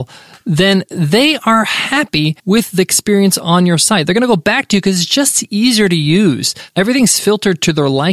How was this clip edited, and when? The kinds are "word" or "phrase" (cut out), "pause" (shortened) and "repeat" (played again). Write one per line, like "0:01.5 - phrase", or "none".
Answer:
0:02.4 - pause